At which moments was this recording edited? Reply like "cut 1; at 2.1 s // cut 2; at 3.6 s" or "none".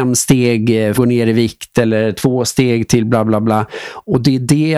cut 1; at 0.9 s